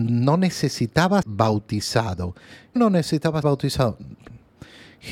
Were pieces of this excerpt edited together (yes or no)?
yes